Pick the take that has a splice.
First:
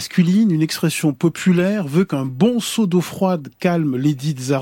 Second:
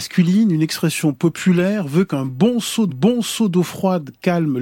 second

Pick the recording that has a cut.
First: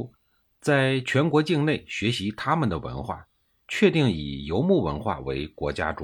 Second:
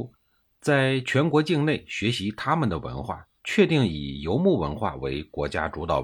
second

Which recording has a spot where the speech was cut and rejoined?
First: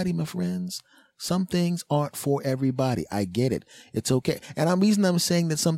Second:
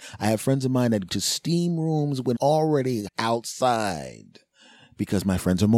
second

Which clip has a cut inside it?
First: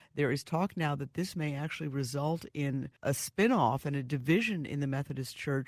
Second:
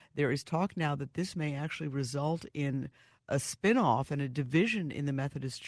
first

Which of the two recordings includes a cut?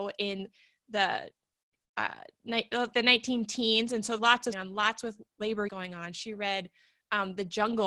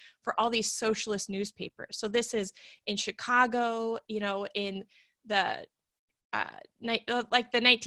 first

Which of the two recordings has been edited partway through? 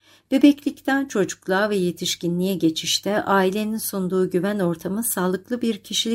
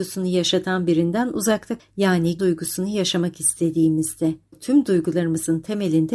second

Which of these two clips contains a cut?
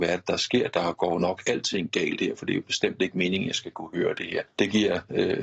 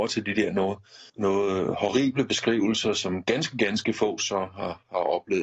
second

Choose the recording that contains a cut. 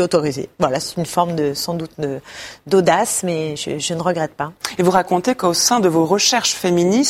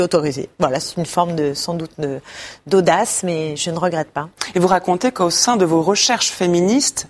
second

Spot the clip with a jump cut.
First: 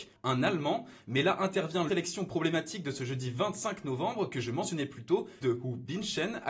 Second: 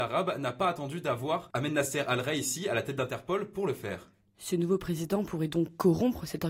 first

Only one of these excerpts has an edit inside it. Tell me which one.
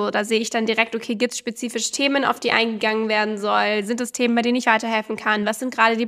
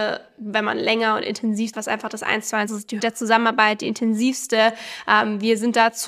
second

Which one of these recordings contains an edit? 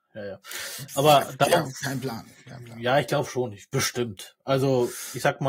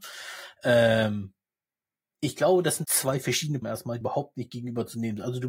second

